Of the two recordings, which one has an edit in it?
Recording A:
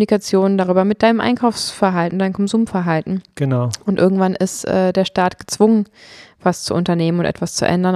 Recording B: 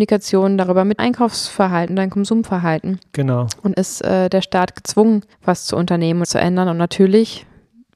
B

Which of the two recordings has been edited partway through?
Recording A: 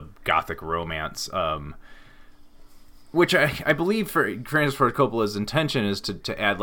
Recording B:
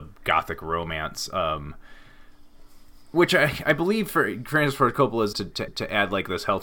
B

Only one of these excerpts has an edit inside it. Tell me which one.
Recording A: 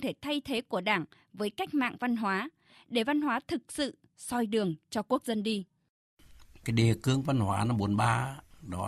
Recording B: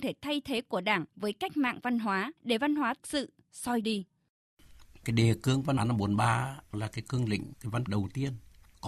B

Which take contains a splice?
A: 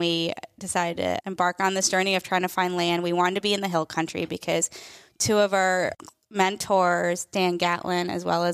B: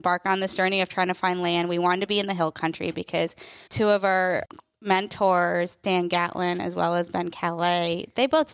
B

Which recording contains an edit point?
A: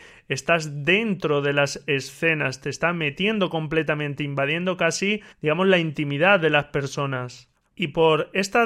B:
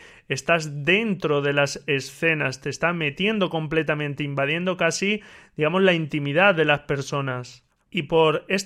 A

